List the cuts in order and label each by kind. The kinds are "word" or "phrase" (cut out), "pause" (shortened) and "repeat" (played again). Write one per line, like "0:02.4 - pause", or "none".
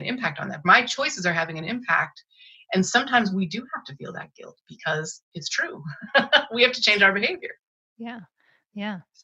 none

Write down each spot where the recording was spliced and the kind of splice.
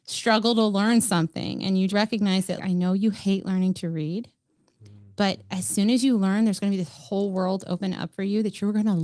0:01.9 - word
0:02.6 - word

